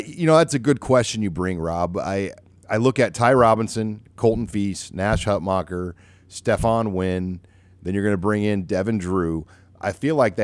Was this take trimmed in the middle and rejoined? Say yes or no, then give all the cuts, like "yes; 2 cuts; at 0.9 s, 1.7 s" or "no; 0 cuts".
no; 0 cuts